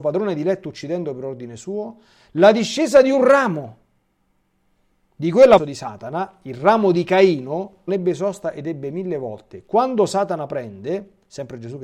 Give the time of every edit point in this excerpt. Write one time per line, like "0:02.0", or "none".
0:05.6
0:07.9